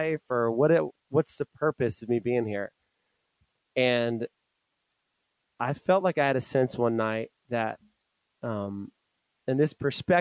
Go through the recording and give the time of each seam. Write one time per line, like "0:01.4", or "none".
none